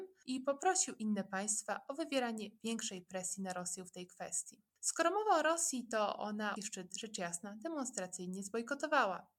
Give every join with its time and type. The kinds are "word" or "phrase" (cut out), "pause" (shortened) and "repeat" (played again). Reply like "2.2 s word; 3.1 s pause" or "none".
4.7 s pause; 6.6 s word

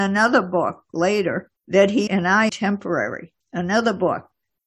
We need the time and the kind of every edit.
1.6 s pause; 2.1 s phrase; 2.5 s word; 3.4 s pause

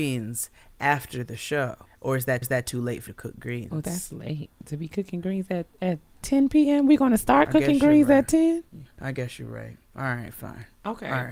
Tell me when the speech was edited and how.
1.9 s pause; 2.4 s repeat; 3.1 s word; 8.9 s pause; 9.8 s pause

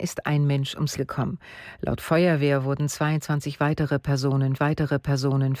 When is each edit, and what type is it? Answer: 1.0 s word; 4.6 s repeat

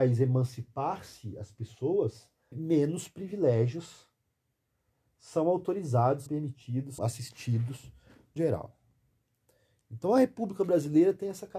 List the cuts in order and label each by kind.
2.5 s word; 6.3 s word; 7.0 s word; 8.4 s word

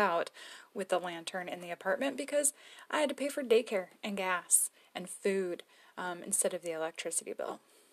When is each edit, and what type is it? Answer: none

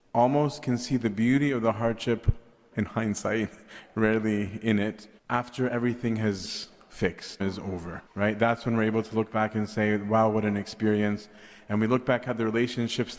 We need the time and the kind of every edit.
2.7 s word; 5.2 s pause; 7.4 s phrase; 8.1 s pause

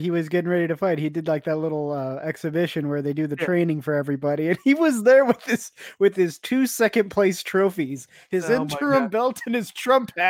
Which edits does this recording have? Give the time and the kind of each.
none

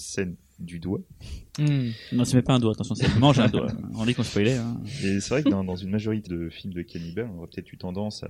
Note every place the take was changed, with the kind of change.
6.3 s word

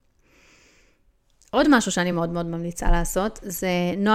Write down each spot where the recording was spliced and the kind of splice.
none

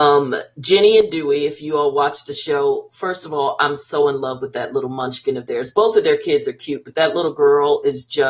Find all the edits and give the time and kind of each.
none

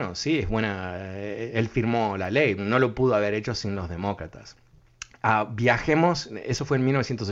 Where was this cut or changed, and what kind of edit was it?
2.6 s word

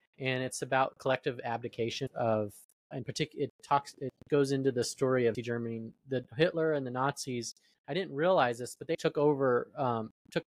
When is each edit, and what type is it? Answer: 2.1 s word; 2.9 s word; 5.3 s phrase; 7.7 s pause; 8.9 s word

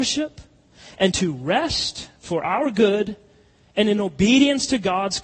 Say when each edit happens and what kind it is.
none

